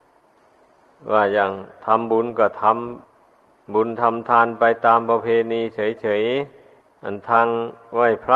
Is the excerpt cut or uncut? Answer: cut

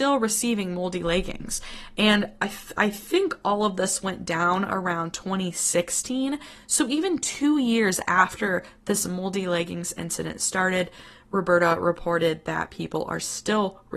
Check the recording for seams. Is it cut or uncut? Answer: uncut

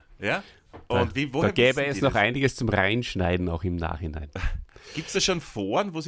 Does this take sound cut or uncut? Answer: uncut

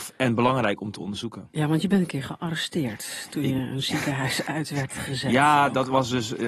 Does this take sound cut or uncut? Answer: uncut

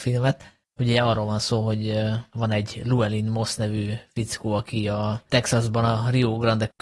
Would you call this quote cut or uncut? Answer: uncut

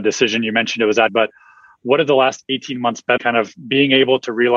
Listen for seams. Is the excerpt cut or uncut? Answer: cut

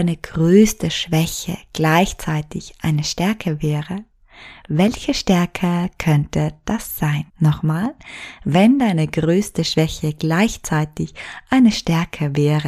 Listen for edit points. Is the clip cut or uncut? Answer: cut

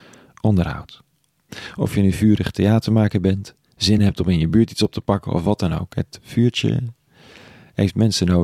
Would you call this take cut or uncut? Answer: uncut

